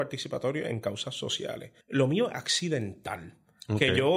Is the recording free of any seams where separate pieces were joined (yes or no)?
no